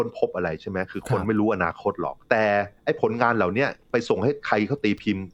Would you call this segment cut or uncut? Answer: cut